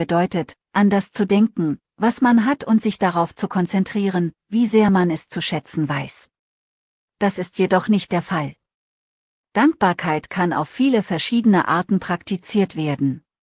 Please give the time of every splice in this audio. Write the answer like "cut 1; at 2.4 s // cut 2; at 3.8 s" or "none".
none